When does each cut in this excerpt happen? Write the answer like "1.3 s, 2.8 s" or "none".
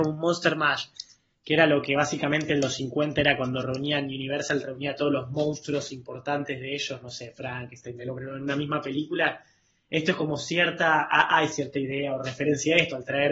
8.0 s